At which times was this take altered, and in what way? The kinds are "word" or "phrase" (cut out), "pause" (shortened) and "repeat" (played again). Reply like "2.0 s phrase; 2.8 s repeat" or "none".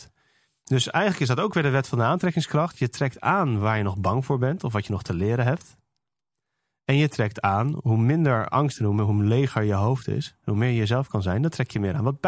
none

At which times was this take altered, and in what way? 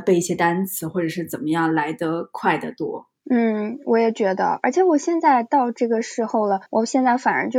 3.2 s pause; 6.7 s pause

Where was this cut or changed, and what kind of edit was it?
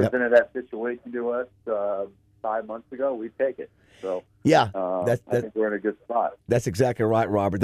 none

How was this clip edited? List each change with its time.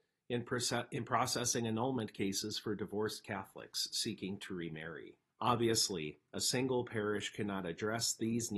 5.3 s pause

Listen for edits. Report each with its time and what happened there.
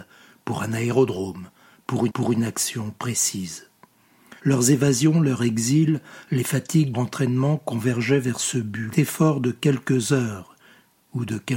2.1 s repeat; 4.4 s pause; 6.9 s phrase; 8.9 s phrase

